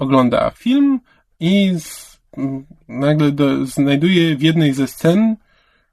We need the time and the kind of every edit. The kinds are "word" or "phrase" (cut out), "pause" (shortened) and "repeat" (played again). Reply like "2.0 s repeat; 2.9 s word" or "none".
none